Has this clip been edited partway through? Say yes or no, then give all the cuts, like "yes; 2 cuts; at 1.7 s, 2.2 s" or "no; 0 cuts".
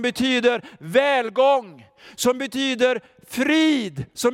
no; 0 cuts